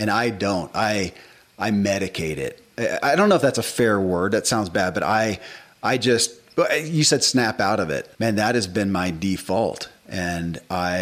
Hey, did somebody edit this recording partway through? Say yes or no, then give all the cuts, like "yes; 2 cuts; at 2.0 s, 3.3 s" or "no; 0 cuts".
yes; 1 cut; at 8.1 s